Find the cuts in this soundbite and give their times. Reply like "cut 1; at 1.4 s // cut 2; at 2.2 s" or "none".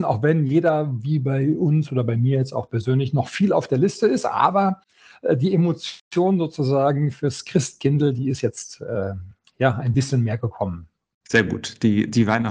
none